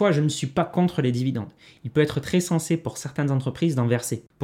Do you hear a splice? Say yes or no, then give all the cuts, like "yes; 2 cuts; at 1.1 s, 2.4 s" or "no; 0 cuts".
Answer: no; 0 cuts